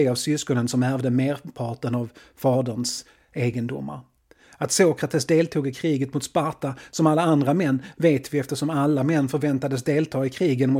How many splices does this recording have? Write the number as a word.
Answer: zero